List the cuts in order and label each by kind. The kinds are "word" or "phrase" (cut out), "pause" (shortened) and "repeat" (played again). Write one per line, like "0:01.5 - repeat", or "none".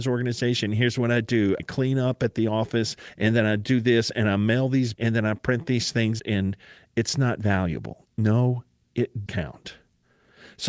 0:01.6 - word
0:04.9 - word
0:06.2 - word
0:09.3 - word